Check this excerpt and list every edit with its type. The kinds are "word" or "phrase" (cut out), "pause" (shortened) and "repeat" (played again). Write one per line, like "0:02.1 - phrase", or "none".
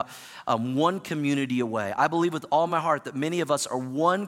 none